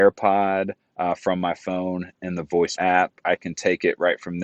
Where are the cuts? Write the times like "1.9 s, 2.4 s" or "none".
2.8 s